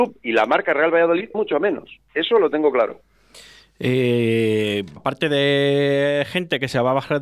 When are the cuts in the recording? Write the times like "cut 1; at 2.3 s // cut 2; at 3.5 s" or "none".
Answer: cut 1; at 1.3 s // cut 2; at 5.0 s